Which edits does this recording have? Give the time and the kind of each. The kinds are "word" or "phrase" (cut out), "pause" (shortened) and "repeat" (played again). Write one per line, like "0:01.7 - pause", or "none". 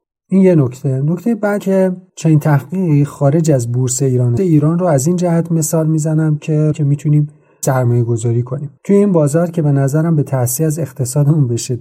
0:01.6 - word
0:02.1 - pause
0:04.4 - phrase
0:06.7 - phrase
0:07.6 - word
0:08.8 - pause